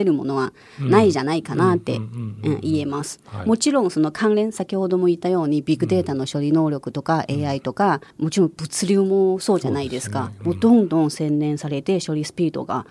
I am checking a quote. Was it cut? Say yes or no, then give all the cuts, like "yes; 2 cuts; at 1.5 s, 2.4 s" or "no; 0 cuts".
yes; 1 cut; at 8.1 s